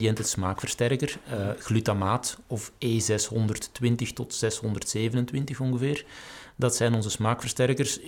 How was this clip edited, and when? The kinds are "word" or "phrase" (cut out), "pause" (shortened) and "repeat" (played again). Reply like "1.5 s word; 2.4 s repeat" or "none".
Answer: none